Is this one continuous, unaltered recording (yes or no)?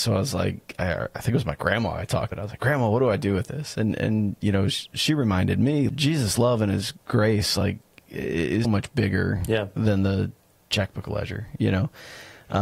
no